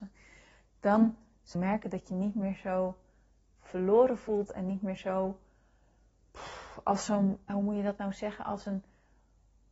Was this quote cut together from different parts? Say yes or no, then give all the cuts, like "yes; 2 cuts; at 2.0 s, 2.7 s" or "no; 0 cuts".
yes; 2 cuts; at 1.5 s, 7.5 s